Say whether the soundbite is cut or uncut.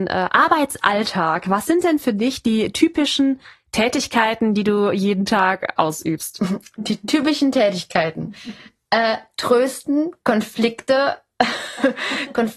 uncut